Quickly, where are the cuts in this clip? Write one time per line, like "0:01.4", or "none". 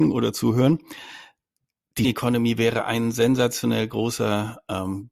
0:02.0